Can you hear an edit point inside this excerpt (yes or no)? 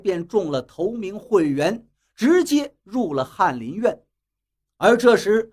no